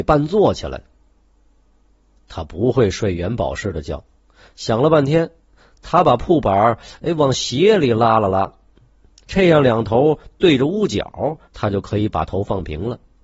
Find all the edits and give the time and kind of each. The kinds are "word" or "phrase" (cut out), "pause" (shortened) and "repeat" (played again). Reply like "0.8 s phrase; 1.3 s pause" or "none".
11.5 s pause